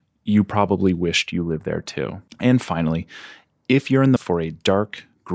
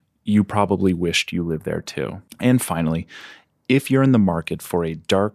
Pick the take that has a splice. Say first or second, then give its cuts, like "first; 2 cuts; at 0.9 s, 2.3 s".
first; 1 cut; at 4.2 s